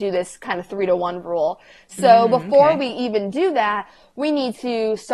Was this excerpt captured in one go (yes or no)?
yes